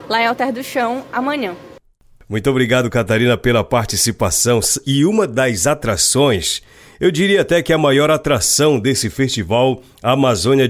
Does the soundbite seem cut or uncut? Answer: uncut